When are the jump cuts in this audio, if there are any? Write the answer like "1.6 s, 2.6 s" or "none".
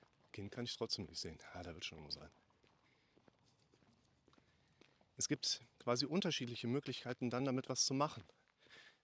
none